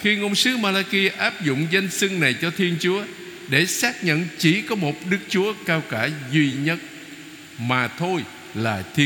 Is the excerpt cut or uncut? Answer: uncut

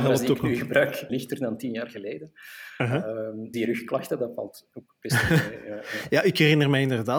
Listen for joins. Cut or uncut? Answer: cut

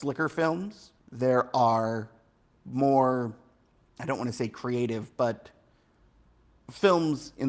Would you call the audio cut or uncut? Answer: cut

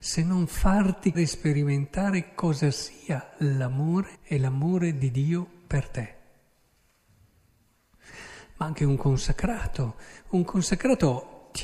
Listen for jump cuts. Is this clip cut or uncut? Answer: cut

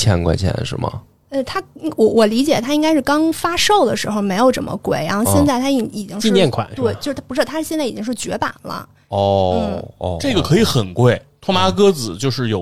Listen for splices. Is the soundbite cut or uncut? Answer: uncut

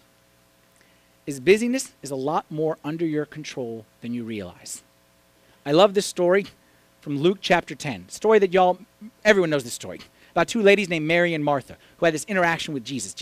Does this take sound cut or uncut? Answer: uncut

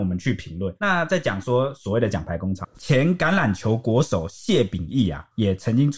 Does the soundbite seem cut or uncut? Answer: cut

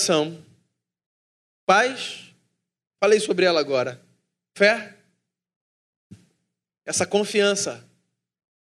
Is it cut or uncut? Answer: uncut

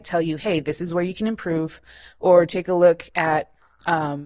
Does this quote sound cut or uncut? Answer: uncut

